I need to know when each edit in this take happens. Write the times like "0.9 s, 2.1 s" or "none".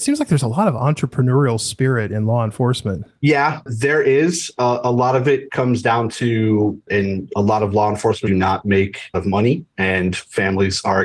8.3 s, 9.1 s